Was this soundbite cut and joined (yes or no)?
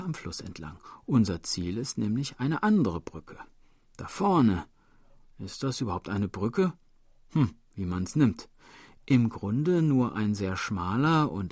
no